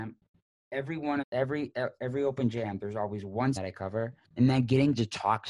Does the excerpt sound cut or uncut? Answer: cut